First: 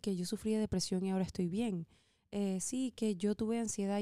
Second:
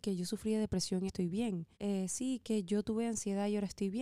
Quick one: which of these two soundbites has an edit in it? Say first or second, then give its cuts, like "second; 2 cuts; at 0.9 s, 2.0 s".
second; 2 cuts; at 1.1 s, 1.7 s